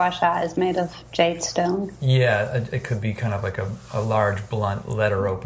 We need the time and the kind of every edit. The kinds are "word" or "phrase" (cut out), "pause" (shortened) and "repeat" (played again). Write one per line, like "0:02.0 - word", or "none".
none

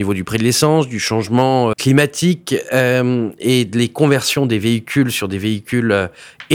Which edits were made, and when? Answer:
0:01.7 - word

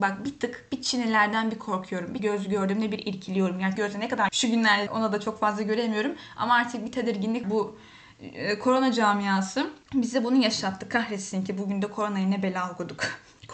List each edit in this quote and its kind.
0:02.2 - word
0:03.8 - word
0:04.3 - word
0:04.9 - phrase
0:07.4 - word
0:09.8 - pause

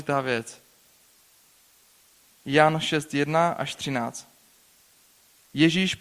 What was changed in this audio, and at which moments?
none

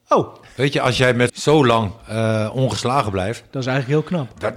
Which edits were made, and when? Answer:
0:01.3 - phrase

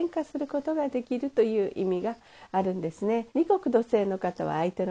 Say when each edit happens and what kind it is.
0:03.3 - pause

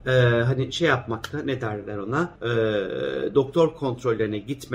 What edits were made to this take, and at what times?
0:02.4 - pause

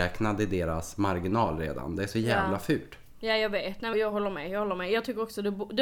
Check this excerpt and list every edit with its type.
0:03.9 - word

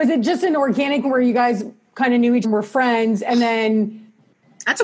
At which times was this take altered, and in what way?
0:01.0 - word
0:02.4 - word

